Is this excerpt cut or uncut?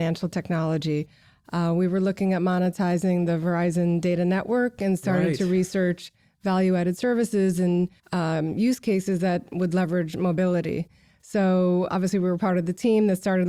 cut